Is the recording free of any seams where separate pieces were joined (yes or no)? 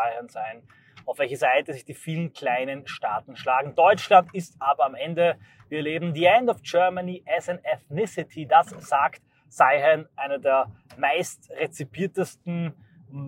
yes